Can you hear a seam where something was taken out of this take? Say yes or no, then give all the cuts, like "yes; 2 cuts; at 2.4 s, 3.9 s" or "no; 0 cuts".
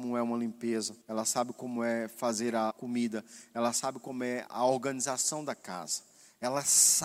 yes; 3 cuts; at 1.0 s, 2.7 s, 4.5 s